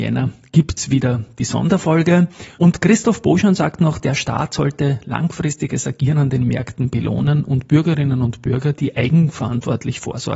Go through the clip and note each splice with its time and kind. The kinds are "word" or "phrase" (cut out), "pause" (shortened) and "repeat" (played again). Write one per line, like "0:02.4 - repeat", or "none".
0:02.5 - pause